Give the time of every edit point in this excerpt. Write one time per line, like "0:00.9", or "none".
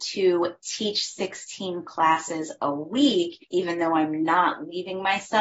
0:03.4